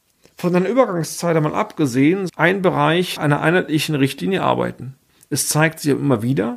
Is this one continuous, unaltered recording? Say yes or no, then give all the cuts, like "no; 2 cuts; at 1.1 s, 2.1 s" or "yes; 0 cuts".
no; 3 cuts; at 2.3 s, 3.2 s, 5.1 s